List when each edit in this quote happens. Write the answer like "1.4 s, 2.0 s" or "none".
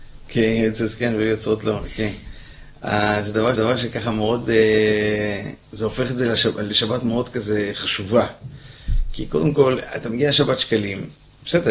3.5 s, 5.6 s